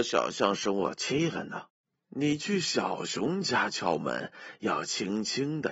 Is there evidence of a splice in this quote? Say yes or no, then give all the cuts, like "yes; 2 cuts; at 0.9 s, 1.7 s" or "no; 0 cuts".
yes; 1 cut; at 1.9 s